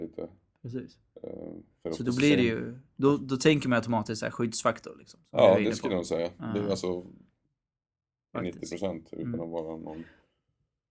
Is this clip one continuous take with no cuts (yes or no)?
yes